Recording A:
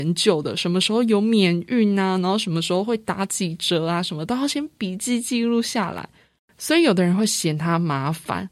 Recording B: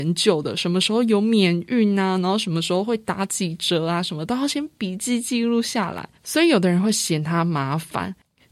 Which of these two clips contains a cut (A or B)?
B